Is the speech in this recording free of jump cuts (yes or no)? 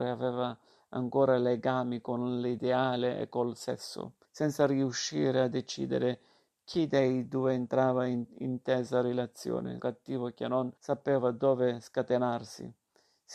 no